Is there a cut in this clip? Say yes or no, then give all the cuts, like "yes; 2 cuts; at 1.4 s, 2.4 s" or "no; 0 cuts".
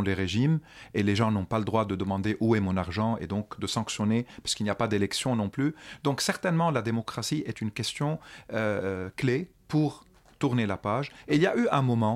yes; 1 cut; at 9.6 s